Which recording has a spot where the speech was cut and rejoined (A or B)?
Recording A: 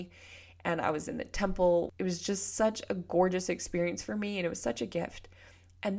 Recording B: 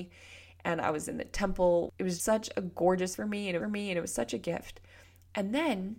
B